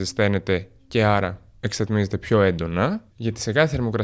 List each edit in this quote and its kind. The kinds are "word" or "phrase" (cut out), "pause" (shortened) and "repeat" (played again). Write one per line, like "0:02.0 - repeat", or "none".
0:03.1 - pause